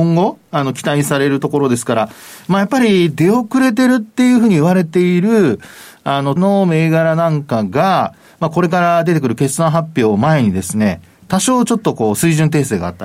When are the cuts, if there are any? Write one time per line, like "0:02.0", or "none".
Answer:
0:06.4